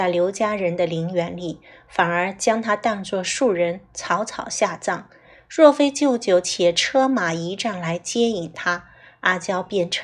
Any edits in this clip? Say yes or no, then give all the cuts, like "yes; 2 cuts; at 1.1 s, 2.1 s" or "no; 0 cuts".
no; 0 cuts